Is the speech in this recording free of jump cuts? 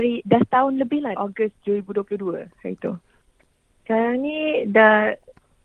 no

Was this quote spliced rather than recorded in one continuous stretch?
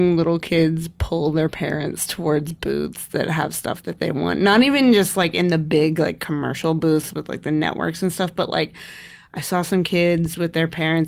no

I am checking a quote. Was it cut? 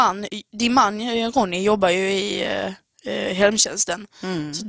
no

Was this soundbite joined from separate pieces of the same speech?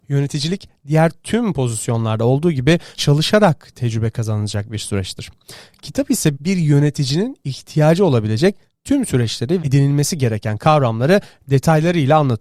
yes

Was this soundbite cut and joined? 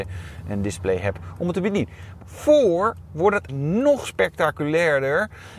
yes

